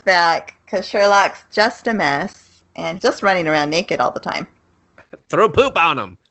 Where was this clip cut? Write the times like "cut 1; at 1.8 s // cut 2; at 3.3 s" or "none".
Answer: cut 1; at 3.0 s